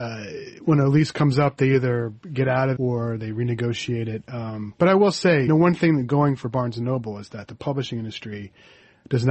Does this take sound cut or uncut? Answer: cut